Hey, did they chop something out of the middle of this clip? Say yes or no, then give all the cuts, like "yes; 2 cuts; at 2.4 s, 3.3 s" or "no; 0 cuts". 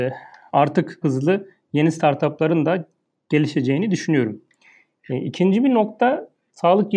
yes; 1 cut; at 1.0 s